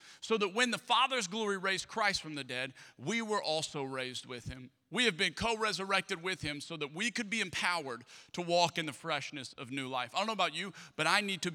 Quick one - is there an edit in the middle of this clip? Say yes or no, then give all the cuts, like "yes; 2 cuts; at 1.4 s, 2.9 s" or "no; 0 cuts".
no; 0 cuts